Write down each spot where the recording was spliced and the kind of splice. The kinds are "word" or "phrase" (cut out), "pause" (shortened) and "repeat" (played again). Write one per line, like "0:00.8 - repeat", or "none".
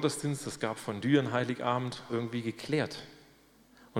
0:02.1 - phrase

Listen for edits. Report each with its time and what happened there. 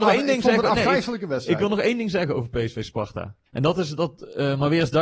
0:03.5 - pause

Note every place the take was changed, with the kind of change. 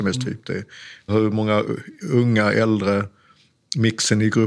0:01.1 - word

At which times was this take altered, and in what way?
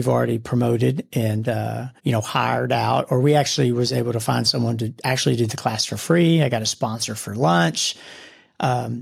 0:02.0 - pause

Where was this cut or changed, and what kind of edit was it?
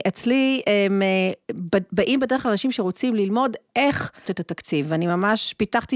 0:04.3 - word

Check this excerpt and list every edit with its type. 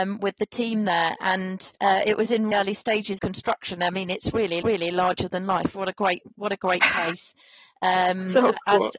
0:01.8 - pause
0:02.5 - word
0:03.2 - word
0:04.6 - repeat

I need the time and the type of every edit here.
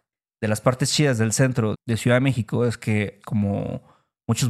0:01.7 - word
0:03.2 - phrase

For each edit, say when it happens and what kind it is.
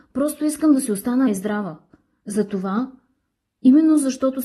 0:01.3 - word

